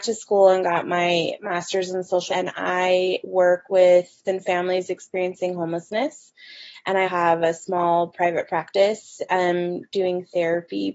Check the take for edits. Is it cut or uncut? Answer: cut